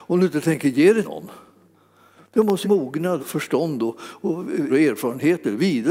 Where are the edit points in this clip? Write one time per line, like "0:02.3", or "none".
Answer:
0:01.0
0:02.6
0:03.2
0:04.7